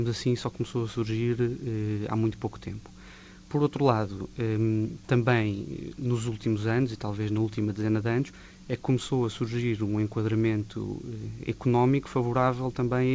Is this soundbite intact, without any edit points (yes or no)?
yes